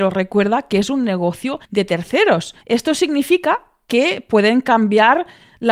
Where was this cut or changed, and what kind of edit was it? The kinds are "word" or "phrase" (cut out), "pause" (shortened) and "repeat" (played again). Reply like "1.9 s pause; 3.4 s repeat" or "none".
1.6 s pause; 2.6 s pause